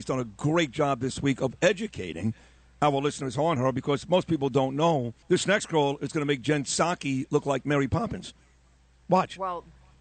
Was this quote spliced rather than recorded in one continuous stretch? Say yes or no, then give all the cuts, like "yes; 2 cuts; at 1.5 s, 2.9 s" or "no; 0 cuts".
yes; 1 cut; at 5.2 s